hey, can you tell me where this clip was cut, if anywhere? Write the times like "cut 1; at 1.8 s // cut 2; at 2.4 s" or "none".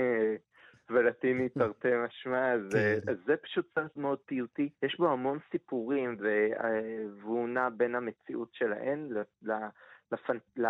cut 1; at 4.0 s // cut 2; at 4.7 s